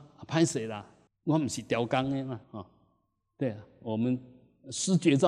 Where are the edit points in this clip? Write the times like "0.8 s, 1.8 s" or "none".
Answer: 1.1 s, 2.4 s